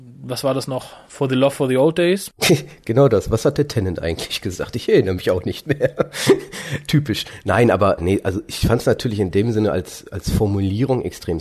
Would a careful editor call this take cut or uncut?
cut